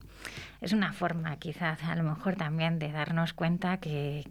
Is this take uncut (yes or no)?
yes